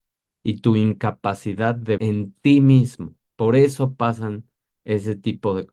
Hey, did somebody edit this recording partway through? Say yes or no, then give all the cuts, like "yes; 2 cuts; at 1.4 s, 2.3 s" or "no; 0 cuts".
yes; 2 cuts; at 2.0 s, 3.2 s